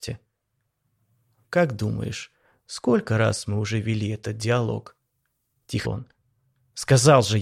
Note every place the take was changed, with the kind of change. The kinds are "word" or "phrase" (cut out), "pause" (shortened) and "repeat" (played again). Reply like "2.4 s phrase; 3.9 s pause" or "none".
5.8 s word